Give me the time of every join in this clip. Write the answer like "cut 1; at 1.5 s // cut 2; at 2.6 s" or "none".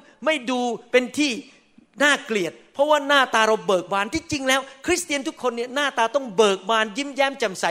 none